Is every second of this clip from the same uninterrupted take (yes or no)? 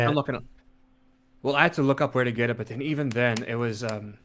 yes